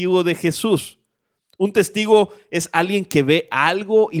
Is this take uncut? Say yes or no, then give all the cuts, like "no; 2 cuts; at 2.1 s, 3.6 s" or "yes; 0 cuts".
yes; 0 cuts